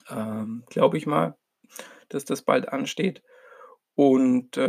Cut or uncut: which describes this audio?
uncut